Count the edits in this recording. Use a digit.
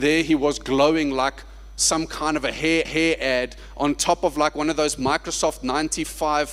1